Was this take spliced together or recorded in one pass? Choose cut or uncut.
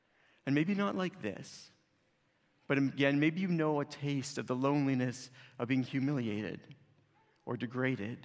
uncut